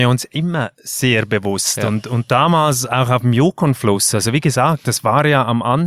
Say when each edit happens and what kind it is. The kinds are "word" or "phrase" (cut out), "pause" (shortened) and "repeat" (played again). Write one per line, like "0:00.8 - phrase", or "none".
none